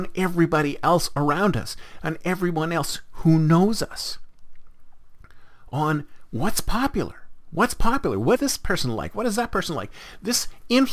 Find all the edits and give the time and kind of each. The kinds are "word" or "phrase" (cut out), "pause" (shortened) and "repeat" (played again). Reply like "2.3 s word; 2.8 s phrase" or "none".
8.4 s word